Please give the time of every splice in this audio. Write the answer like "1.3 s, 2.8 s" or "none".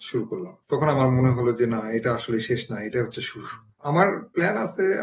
none